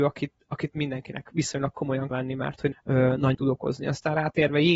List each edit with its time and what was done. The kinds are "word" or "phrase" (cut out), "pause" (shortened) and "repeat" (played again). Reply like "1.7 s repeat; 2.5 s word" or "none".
2.1 s word; 2.7 s word; 3.3 s word